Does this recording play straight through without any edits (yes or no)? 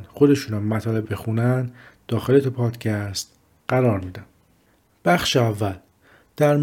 no